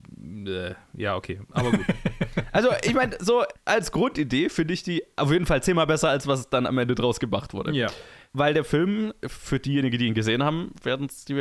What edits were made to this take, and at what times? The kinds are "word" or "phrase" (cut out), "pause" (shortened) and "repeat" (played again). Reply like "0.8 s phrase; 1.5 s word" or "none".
none

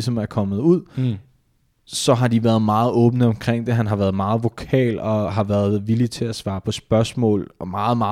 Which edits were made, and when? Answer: none

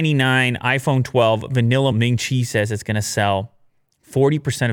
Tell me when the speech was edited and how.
1.9 s word

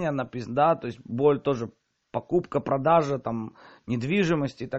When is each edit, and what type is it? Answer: none

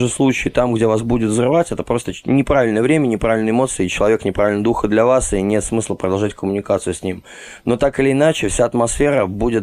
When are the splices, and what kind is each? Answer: none

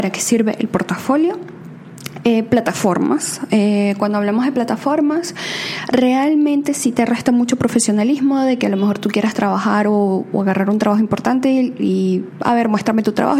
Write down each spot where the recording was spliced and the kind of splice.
none

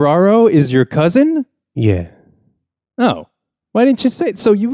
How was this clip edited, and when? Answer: none

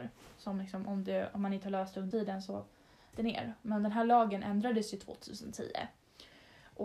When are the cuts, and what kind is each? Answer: 2.1 s word; 3.1 s word

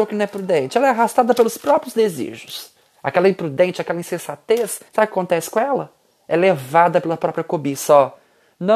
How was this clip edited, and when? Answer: 2.8 s pause; 4.9 s pause

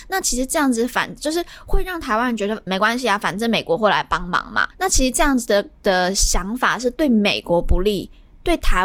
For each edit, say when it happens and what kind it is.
2.7 s word; 4.7 s pause

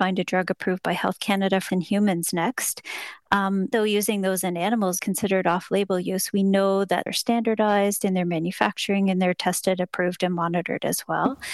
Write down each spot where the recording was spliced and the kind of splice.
1.7 s word; 3.7 s word; 5.0 s word; 7.1 s phrase

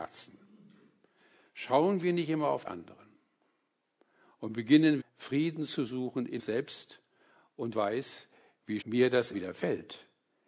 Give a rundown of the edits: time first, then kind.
2.7 s word; 5.0 s word; 6.4 s word; 7.7 s word; 8.8 s word; 9.3 s word

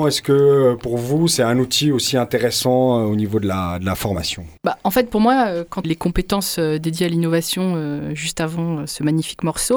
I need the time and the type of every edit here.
4.6 s pause; 5.8 s phrase

